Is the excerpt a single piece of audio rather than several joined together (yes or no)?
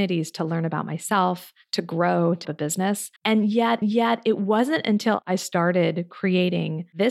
no